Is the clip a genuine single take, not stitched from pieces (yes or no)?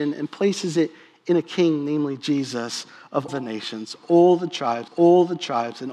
no